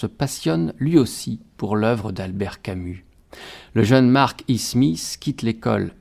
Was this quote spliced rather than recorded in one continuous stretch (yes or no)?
no